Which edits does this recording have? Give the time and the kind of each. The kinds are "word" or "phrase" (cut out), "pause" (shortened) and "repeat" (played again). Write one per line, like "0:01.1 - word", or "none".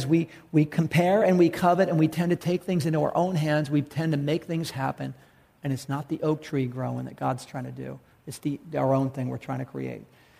none